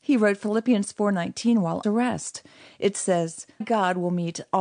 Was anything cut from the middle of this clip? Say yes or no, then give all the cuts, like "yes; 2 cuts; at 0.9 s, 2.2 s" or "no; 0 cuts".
yes; 2 cuts; at 1.8 s, 3.6 s